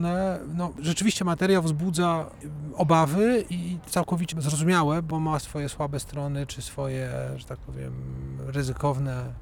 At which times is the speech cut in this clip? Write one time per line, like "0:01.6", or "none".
0:03.9
0:05.4